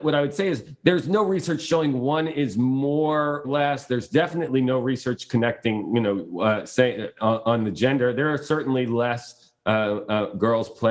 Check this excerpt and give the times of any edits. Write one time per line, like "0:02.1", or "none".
0:03.4